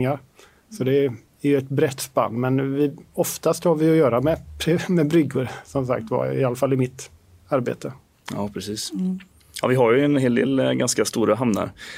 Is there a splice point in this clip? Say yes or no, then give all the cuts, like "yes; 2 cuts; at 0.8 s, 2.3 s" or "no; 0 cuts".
no; 0 cuts